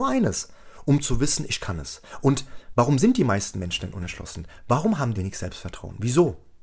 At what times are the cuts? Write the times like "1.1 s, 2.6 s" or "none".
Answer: 5.1 s